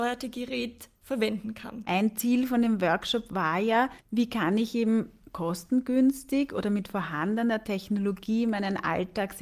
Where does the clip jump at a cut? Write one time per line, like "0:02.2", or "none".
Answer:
0:04.0